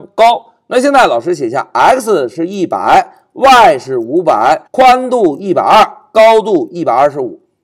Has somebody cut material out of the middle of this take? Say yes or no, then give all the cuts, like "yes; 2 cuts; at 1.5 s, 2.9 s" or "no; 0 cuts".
yes; 1 cut; at 4.7 s